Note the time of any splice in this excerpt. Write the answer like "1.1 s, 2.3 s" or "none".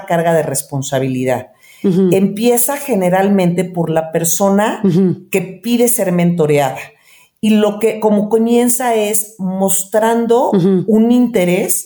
none